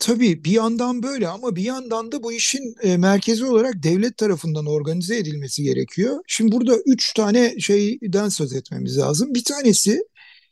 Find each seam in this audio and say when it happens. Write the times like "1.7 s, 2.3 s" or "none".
none